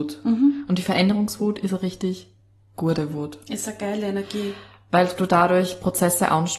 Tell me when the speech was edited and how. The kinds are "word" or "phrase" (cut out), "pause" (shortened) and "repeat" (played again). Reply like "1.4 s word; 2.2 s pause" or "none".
none